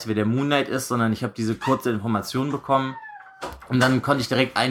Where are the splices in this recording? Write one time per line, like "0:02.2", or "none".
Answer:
none